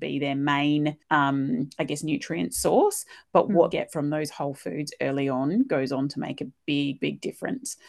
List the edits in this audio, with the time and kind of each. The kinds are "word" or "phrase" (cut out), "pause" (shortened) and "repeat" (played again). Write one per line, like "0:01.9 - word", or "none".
0:01.0 - pause
0:03.7 - phrase